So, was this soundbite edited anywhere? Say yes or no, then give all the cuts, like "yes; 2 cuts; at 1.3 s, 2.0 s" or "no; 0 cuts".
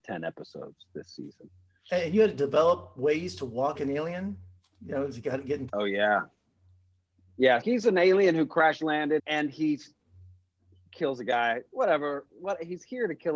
yes; 4 cuts; at 3.8 s, 5.7 s, 7.6 s, 9.2 s